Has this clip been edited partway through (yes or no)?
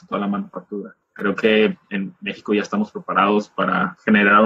no